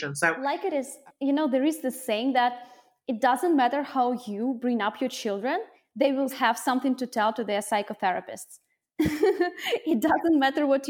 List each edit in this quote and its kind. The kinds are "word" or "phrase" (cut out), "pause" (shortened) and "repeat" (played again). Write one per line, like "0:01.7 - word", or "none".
0:06.3 - word